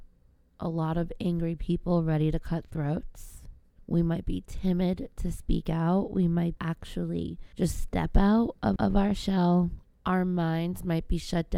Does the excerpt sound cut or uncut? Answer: cut